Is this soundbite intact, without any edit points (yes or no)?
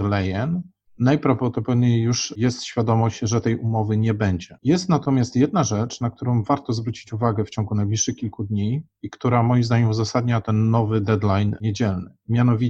yes